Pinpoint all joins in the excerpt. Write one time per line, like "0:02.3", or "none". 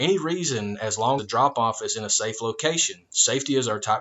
0:01.2